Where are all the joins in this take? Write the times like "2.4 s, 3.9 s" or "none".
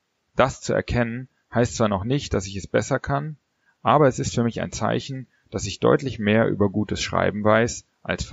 none